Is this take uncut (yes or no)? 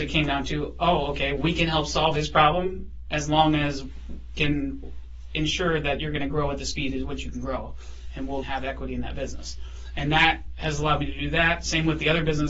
no